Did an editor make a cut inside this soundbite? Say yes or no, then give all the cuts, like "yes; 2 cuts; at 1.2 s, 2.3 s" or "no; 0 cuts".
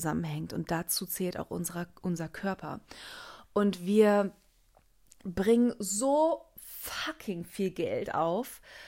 no; 0 cuts